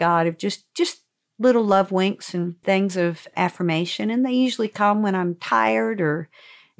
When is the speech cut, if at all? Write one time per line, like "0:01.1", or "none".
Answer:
none